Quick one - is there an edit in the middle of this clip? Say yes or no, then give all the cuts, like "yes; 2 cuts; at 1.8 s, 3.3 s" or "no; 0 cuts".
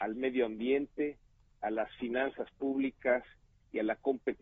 no; 0 cuts